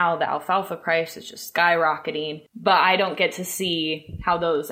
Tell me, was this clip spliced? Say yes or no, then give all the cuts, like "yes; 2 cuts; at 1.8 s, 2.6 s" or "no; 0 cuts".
yes; 1 cut; at 2.5 s